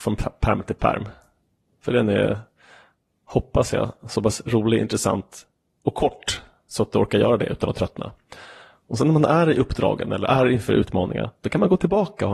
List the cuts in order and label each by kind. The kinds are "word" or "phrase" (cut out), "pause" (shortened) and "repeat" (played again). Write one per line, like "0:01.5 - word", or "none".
none